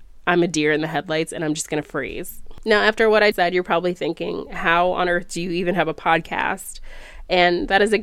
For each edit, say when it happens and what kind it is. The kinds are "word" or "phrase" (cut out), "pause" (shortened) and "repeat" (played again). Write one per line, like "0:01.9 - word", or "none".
0:03.3 - word